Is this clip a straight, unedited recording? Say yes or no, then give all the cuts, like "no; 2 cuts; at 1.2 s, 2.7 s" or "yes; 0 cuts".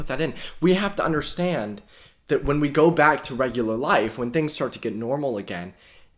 yes; 0 cuts